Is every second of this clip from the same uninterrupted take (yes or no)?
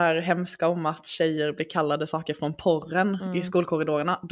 yes